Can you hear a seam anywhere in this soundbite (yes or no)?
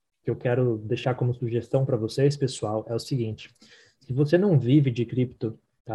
no